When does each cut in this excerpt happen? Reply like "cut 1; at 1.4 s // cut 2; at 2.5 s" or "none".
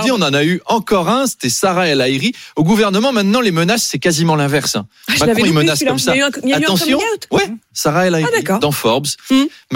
none

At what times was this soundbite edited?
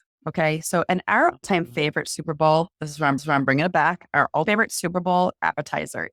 cut 1; at 1.4 s // cut 2; at 3.2 s // cut 3; at 4.5 s

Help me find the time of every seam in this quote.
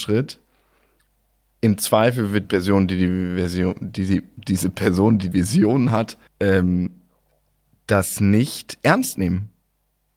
cut 1; at 2.4 s // cut 2; at 5.3 s // cut 3; at 6.3 s

